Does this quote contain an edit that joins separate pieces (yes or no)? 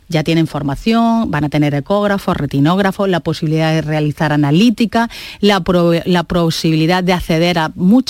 no